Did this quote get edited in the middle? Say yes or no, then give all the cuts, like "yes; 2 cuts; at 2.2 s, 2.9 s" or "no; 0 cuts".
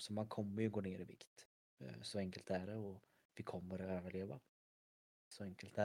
no; 0 cuts